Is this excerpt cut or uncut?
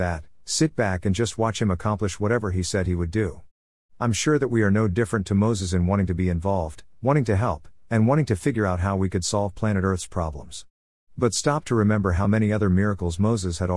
uncut